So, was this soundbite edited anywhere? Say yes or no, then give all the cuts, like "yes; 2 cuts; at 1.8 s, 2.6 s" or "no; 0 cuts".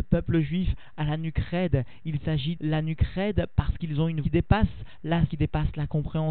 yes; 3 cuts; at 2.6 s, 4.2 s, 5.3 s